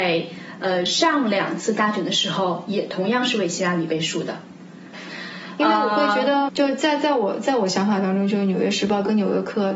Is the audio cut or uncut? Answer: cut